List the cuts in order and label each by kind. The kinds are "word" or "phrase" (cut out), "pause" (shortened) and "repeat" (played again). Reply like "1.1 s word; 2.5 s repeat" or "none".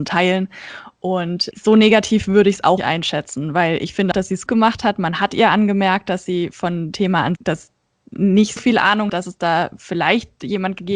1.5 s word; 2.8 s word; 4.1 s word; 4.5 s word; 6.9 s word; 7.4 s word; 8.6 s word; 9.1 s word

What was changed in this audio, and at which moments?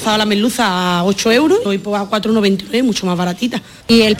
1.7 s word

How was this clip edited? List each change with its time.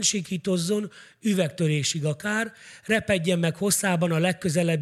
none

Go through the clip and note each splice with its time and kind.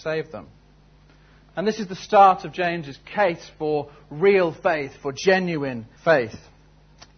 6.0 s pause

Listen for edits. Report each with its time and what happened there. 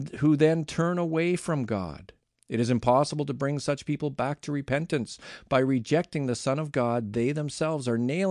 none

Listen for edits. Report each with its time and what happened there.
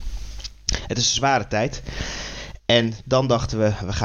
none

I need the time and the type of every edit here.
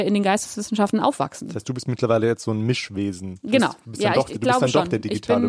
none

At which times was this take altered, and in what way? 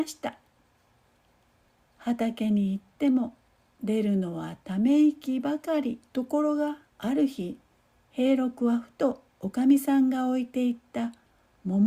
6.1 s pause; 6.9 s pause; 7.7 s pause

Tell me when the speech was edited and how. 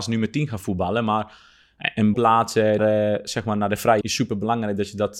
2.1 s word; 2.8 s word; 4.0 s word

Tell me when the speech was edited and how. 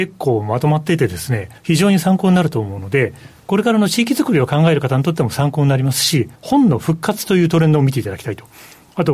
1.6 s pause; 6.4 s pause

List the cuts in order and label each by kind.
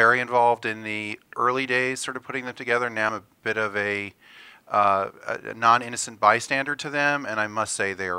3.1 s word

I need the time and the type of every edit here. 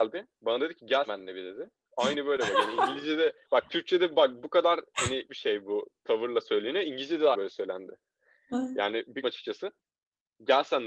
1.1 s word; 5.3 s word; 7.3 s word; 9.2 s word

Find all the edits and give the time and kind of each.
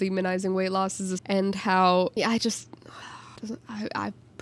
1.2 s word; 2.2 s word; 3.4 s pause

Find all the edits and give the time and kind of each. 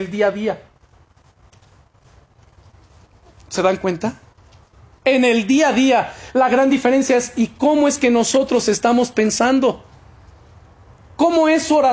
none

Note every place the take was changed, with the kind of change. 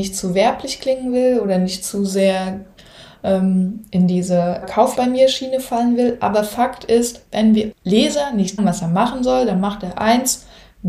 4.6 s word; 4.9 s word; 7.7 s word; 8.6 s word

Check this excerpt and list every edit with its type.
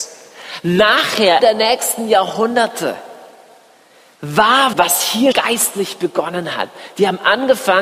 1.4 s phrase; 4.7 s word; 5.3 s word

